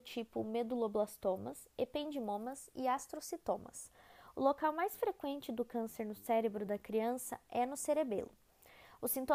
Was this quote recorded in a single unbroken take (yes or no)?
yes